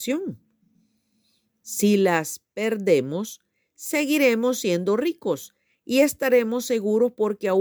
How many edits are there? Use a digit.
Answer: 0